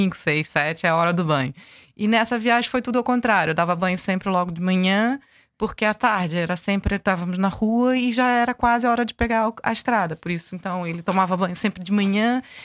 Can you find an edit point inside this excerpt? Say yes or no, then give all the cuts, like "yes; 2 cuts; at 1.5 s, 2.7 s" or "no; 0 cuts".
no; 0 cuts